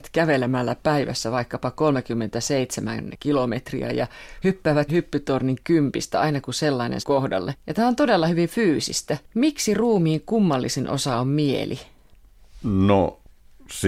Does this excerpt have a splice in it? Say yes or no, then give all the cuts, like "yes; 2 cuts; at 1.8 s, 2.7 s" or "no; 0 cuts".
yes; 2 cuts; at 4.9 s, 7.0 s